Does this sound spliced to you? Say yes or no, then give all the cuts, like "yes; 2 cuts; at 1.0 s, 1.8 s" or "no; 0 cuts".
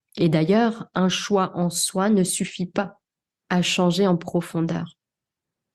no; 0 cuts